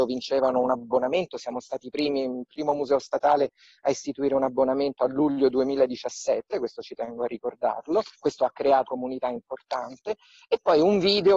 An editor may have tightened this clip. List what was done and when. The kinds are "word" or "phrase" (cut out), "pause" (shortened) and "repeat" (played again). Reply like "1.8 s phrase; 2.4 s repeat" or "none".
8.1 s pause; 8.8 s word